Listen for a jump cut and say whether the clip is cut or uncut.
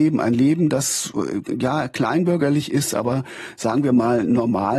uncut